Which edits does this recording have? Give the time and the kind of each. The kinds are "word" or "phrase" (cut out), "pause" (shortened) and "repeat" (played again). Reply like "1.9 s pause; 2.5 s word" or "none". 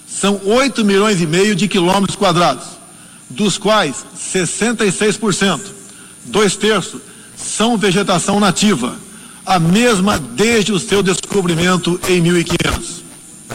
none